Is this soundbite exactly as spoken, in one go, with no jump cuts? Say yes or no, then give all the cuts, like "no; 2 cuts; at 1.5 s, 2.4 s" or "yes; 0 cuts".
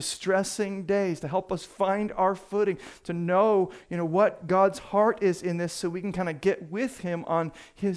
yes; 0 cuts